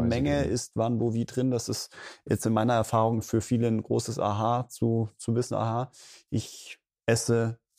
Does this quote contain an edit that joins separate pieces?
no; 0 cuts

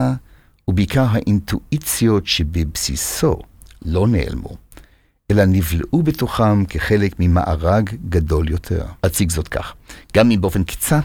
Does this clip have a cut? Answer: yes; 1 cut; at 9.0 s

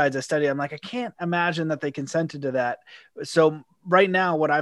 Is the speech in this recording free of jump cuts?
yes; 0 cuts

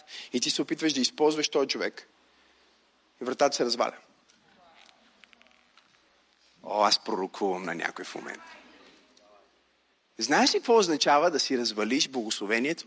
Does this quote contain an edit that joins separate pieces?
no; 0 cuts

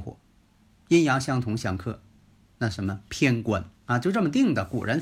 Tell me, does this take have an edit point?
yes; 1 cut; at 3.8 s

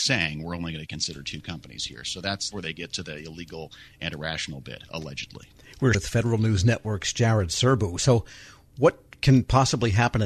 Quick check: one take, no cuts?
no; 2 cuts; at 2.5 s, 5.9 s

